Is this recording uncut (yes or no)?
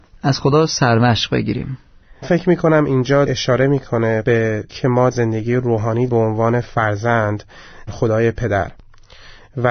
no